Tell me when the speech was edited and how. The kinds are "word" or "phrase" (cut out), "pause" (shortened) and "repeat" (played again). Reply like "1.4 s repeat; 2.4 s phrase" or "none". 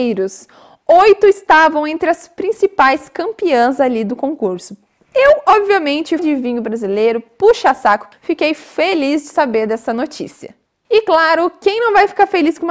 6.2 s word; 8.1 s word